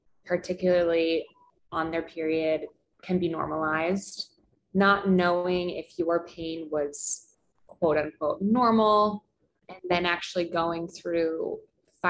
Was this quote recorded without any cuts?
yes; 0 cuts

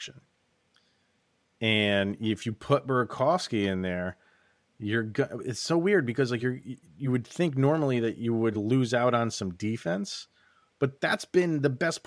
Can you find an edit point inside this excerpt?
no; 0 cuts

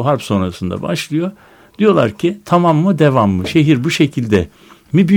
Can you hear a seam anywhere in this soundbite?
no; 0 cuts

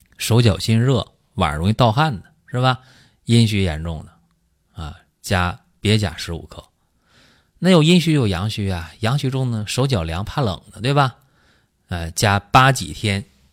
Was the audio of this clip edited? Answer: no; 0 cuts

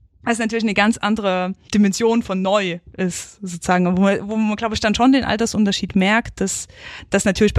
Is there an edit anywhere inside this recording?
no; 0 cuts

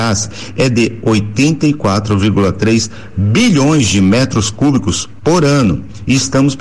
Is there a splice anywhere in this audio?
no; 0 cuts

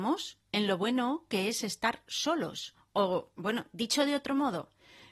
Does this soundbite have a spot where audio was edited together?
no; 0 cuts

